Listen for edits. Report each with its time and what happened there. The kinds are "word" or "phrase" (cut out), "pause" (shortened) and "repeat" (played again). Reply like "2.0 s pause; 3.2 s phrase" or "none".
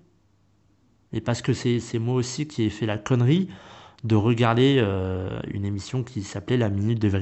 none